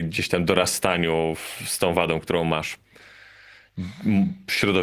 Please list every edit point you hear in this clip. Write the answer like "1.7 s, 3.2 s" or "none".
none